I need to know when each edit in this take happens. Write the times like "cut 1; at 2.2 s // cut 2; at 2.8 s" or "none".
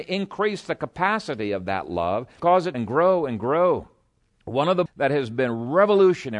cut 1; at 2.4 s // cut 2; at 2.7 s // cut 3; at 4.9 s